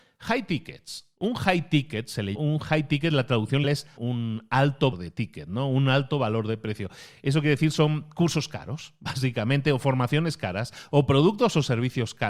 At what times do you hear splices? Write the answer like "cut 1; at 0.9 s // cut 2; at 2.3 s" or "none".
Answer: cut 1; at 2.3 s // cut 2; at 3.6 s // cut 3; at 4.0 s // cut 4; at 4.9 s